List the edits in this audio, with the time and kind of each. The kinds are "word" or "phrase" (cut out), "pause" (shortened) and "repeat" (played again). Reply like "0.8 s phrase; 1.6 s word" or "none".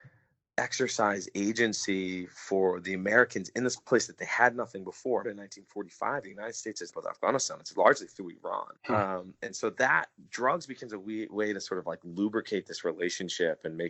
5.2 s phrase; 6.9 s phrase; 8.8 s pause